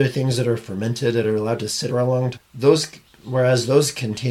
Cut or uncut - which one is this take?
cut